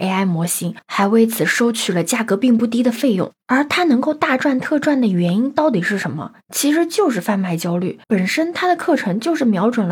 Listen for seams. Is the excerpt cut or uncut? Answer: cut